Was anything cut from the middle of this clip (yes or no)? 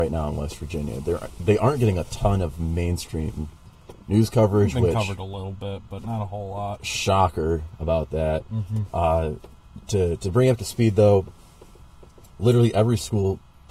no